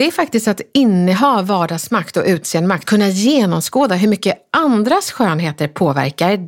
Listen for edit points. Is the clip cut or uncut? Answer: cut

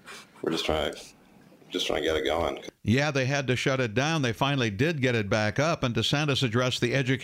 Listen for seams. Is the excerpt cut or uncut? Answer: uncut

